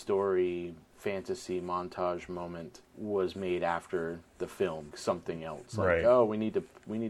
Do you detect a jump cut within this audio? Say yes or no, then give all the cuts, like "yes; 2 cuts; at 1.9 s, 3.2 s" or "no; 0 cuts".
yes; 2 cuts; at 2.9 s, 4.9 s